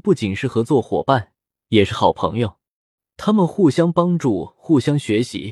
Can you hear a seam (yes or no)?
no